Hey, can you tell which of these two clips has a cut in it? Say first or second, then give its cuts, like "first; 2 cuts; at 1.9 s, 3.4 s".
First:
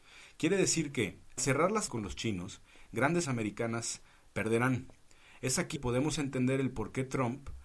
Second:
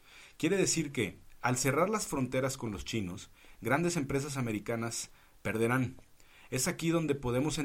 first; 4 cuts; at 1.4 s, 1.9 s, 3.2 s, 5.8 s